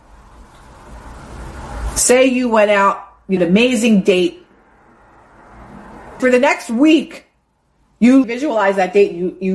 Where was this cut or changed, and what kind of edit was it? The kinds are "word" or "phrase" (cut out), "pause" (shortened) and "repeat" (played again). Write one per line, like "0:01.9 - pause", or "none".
0:03.4 - phrase
0:06.2 - word
0:08.2 - word